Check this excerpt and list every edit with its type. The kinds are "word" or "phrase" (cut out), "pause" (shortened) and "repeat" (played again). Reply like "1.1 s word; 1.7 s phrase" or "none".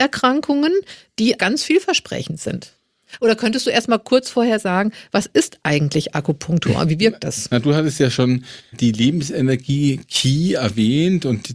1.4 s word; 8.7 s word